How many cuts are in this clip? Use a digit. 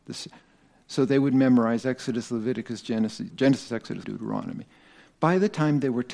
2